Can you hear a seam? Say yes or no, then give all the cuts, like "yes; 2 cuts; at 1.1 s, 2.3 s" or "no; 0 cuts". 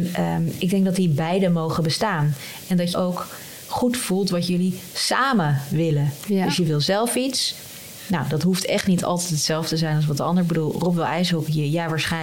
yes; 1 cut; at 2.9 s